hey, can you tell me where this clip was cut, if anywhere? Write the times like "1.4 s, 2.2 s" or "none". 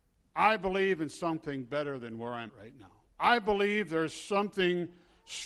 2.5 s, 3.1 s